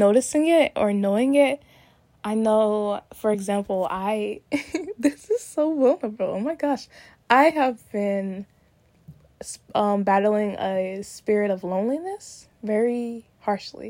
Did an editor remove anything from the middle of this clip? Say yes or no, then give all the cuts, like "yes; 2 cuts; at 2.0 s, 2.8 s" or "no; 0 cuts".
no; 0 cuts